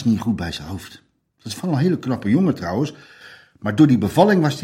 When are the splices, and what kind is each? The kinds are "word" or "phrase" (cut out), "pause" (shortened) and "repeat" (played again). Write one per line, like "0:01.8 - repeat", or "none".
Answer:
none

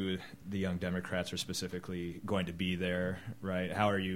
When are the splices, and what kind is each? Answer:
none

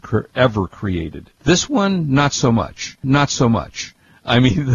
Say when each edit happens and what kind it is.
0:01.3 - pause
0:03.0 - repeat

